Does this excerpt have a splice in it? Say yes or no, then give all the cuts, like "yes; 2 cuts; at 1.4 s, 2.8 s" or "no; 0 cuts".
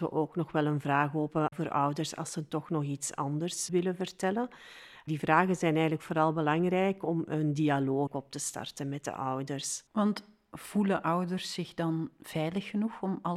yes; 1 cut; at 9.9 s